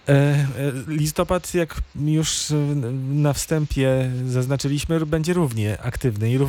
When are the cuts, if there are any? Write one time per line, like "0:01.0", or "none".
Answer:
none